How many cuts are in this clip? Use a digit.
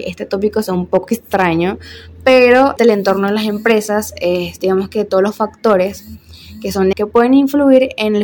2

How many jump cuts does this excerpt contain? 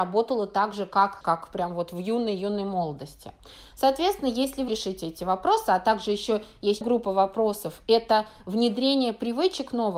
3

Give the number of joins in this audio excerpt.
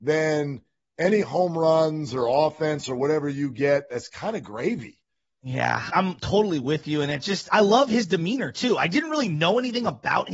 2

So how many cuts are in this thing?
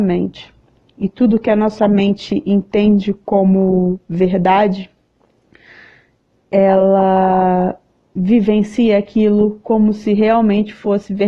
0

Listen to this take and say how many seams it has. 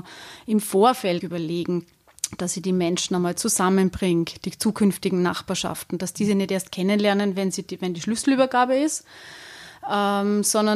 1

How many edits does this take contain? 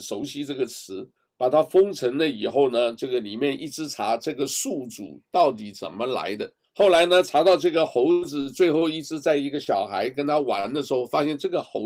2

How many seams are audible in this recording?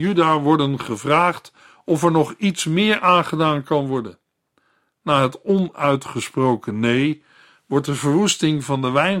0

